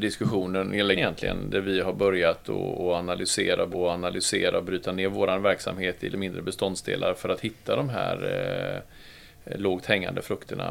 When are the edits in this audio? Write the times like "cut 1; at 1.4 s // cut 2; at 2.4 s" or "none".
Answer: cut 1; at 0.9 s // cut 2; at 3.7 s // cut 3; at 6.1 s